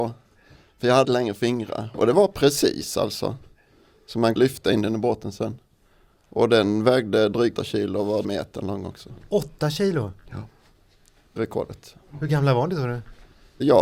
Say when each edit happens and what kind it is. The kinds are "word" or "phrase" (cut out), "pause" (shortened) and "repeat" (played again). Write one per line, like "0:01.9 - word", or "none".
0:01.0 - word
0:04.4 - word
0:07.6 - word
0:08.2 - word
0:11.4 - word